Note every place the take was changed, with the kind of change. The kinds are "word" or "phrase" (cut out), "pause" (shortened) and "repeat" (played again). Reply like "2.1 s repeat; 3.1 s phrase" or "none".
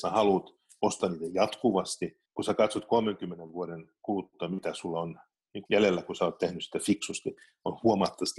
2.3 s pause; 5.7 s word